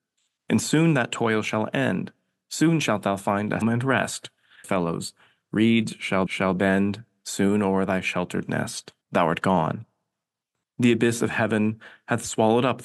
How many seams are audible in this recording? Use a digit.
4